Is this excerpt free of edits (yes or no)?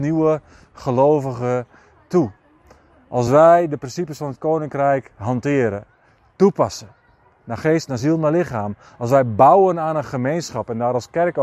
yes